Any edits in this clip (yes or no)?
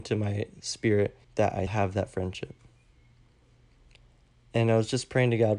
yes